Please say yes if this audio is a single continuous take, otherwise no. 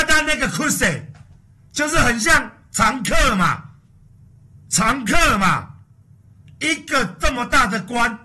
yes